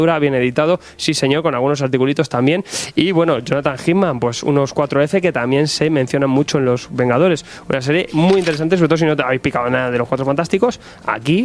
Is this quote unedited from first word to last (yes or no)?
yes